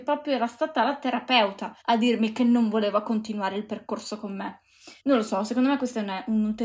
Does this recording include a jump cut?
yes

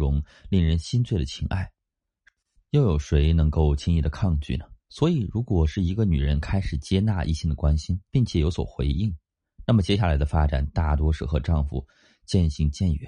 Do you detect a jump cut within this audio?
yes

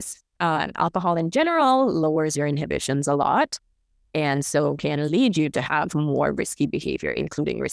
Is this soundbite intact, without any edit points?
yes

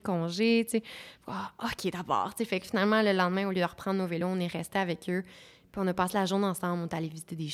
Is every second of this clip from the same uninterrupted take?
yes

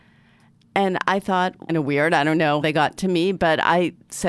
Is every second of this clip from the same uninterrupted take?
no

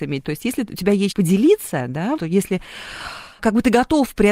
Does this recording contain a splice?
yes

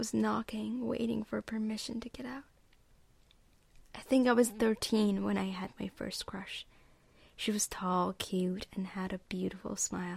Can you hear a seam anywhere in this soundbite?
no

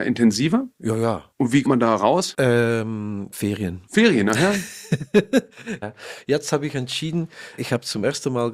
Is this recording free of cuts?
no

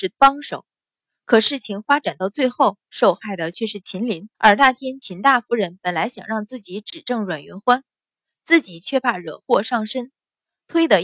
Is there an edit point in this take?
yes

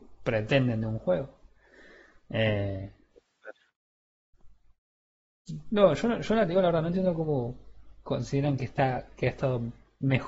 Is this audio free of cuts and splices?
yes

